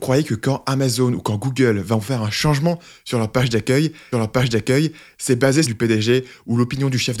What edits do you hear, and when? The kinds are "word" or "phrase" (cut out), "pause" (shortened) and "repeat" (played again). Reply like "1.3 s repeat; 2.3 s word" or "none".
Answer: 4.1 s repeat; 5.6 s phrase